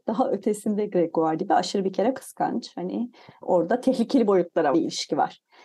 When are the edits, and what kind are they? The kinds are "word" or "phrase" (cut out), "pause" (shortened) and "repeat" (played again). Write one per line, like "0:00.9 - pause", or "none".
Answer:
0:01.4 - word
0:02.1 - word
0:03.4 - word
0:04.7 - word